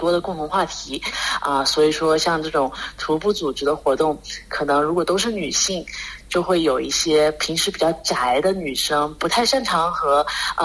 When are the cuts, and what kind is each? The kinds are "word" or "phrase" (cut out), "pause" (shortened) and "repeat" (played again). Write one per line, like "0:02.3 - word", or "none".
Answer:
none